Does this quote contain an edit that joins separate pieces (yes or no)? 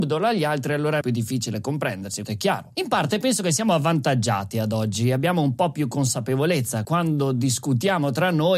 yes